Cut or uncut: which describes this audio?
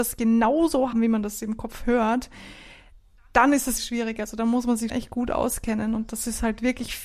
cut